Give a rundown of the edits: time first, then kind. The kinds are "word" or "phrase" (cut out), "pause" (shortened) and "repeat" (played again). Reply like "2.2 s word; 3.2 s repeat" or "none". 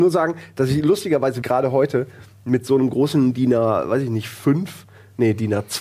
1.4 s word